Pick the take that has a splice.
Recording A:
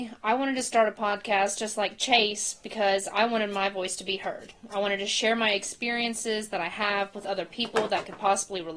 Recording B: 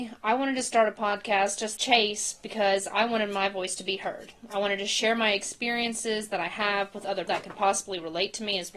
B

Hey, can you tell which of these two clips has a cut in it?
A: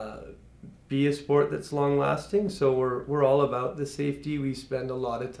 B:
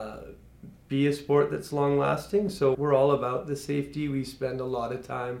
B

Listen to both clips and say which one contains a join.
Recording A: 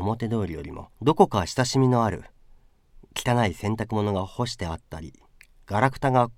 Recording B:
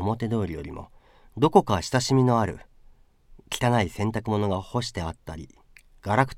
A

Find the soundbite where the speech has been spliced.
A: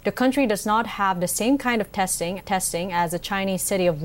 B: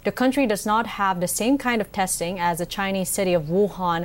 A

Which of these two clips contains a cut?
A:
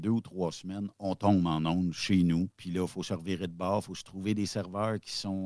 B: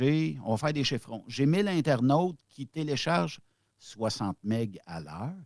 A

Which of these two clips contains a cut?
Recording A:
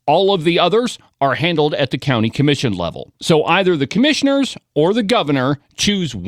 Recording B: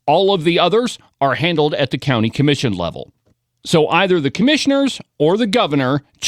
A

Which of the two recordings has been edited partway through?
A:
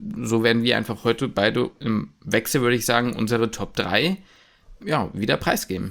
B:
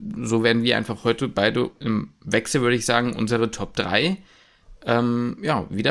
A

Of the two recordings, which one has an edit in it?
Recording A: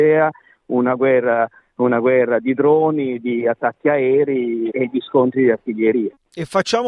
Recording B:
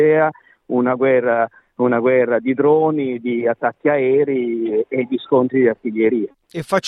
A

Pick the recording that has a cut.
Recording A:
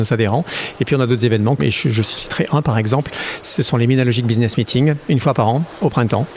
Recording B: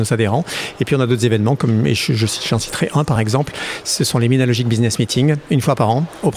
A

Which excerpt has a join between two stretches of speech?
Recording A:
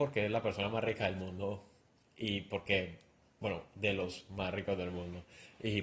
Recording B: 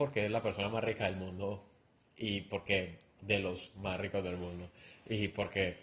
B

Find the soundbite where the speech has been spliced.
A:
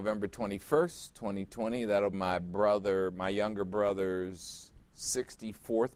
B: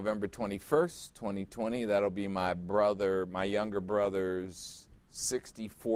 A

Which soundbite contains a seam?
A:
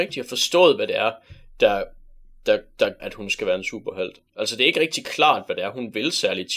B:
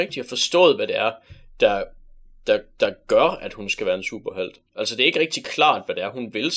A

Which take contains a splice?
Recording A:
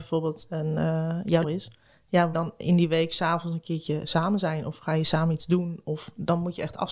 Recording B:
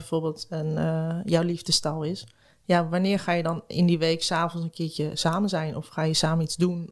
A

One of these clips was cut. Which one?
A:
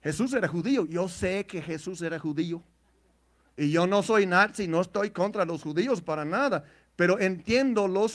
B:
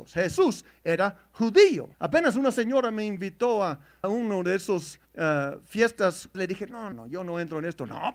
B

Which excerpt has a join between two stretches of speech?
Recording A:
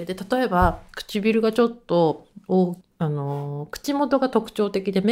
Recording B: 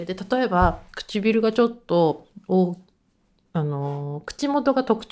A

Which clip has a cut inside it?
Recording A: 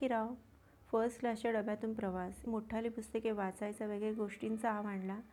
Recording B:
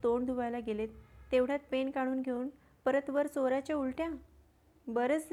A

